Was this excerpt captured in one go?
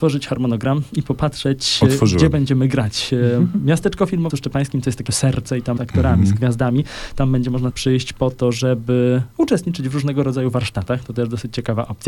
no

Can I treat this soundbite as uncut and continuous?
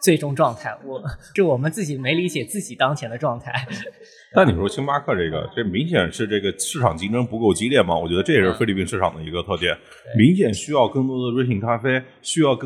yes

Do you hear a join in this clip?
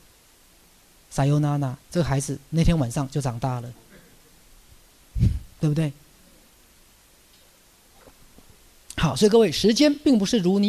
yes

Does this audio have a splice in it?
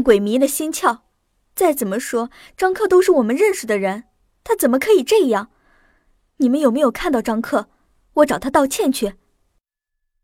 no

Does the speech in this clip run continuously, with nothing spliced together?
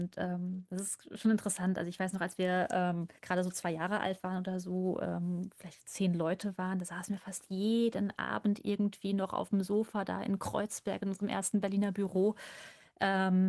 no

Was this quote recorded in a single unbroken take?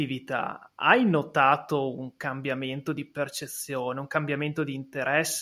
yes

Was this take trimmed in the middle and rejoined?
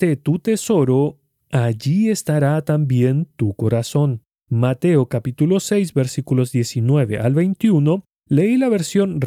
no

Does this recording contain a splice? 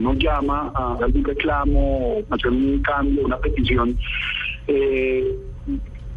yes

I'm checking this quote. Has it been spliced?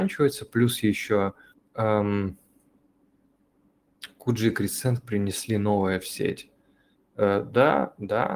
yes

